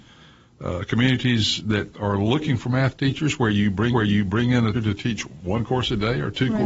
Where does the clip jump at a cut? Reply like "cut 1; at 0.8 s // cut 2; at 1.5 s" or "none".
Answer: cut 1; at 1.9 s // cut 2; at 3.9 s // cut 3; at 4.7 s